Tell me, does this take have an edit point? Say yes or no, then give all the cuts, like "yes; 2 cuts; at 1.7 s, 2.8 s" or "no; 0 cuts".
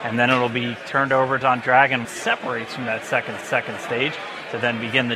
yes; 3 cuts; at 1.4 s, 2.0 s, 3.4 s